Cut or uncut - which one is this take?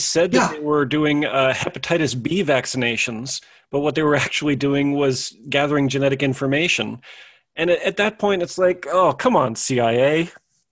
uncut